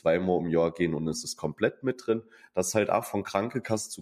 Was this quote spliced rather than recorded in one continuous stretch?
no; 0 cuts

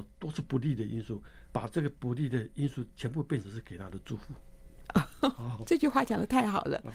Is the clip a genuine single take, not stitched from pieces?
no; 1 cut; at 1.5 s

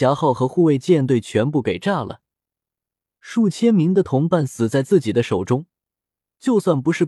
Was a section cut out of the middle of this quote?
no; 0 cuts

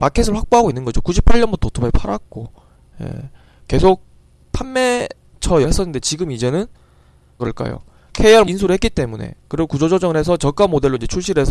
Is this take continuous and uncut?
no; 3 cuts; at 5.6 s, 7.4 s, 8.5 s

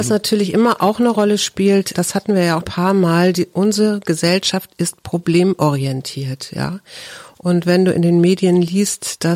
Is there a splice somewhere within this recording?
yes; 2 cuts; at 1.9 s, 2.6 s

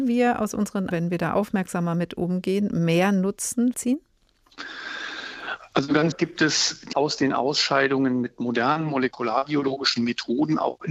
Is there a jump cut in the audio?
yes; 4 cuts; at 0.9 s, 3.7 s, 6.1 s, 6.9 s

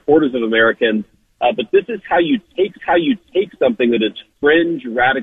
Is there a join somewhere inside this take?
yes; 1 cut; at 2.8 s

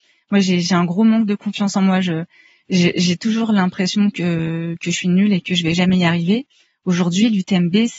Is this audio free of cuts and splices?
yes; 0 cuts

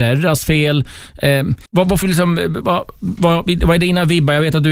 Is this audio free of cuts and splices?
no; 3 cuts; at 1.7 s, 2.0 s, 2.6 s

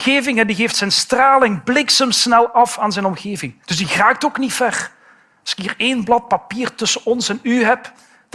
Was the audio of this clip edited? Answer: yes; 1 cut; at 3.6 s

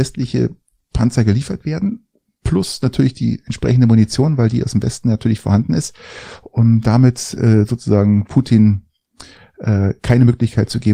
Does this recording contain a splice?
no; 0 cuts

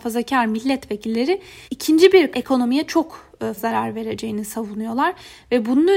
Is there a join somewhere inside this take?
yes; 3 cuts; at 1.6 s, 2.3 s, 3.6 s

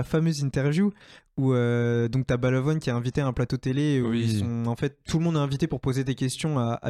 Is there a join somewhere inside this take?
no; 0 cuts

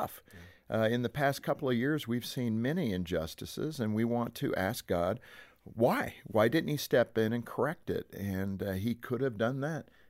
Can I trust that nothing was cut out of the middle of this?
yes; 0 cuts

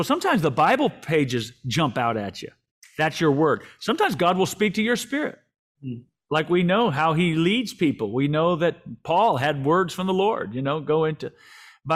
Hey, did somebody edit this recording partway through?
no; 0 cuts

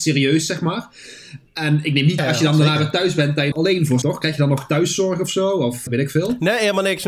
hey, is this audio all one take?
no; 4 cuts; at 2.2 s, 3.5 s, 4.0 s, 5.9 s

